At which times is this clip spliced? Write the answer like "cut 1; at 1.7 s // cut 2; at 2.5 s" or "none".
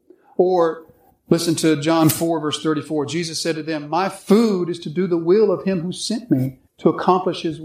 cut 1; at 6.7 s